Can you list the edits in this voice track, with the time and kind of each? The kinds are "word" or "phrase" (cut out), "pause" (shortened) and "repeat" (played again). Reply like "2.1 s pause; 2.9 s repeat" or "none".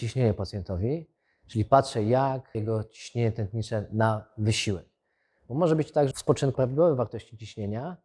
2.5 s word; 6.1 s word; 6.5 s word